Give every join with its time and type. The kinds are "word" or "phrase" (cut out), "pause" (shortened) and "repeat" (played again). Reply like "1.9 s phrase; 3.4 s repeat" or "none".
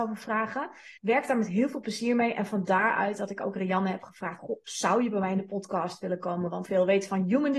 1.0 s pause; 6.7 s phrase